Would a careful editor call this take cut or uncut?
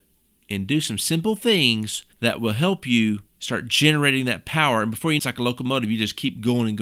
cut